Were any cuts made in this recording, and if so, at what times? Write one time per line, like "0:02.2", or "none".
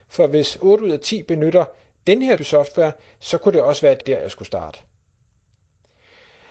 0:02.4
0:04.0